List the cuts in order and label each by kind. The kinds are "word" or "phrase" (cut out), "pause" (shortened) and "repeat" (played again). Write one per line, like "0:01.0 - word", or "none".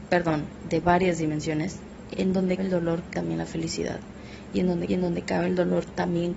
0:02.1 - word
0:02.6 - word
0:03.1 - word
0:04.9 - repeat